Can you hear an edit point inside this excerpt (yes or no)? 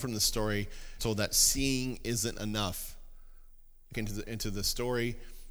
yes